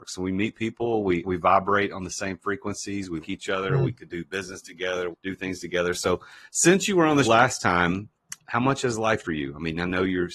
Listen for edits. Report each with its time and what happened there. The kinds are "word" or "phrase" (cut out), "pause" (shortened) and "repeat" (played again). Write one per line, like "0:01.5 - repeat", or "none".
0:01.2 - word
0:03.2 - word
0:05.1 - word
0:07.2 - word
0:08.4 - word
0:09.2 - word